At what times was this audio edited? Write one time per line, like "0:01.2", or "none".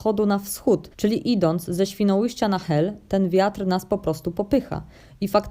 0:00.9